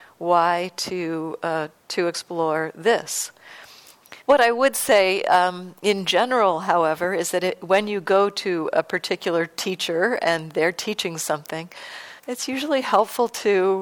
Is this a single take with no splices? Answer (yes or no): no